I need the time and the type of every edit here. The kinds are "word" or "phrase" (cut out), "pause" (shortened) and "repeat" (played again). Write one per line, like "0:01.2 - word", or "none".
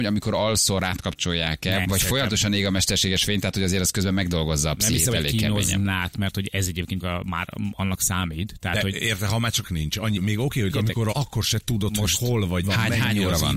0:01.8 - word
0:06.1 - word
0:07.0 - word
0:09.6 - word
0:10.2 - word
0:10.7 - word
0:11.1 - word
0:12.6 - word